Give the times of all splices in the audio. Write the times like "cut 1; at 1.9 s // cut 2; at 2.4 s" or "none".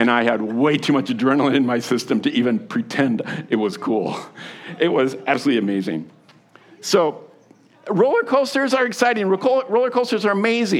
none